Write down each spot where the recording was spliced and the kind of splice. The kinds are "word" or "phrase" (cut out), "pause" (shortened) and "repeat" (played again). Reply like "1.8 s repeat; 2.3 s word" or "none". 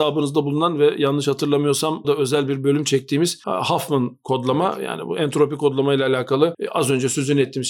2.0 s word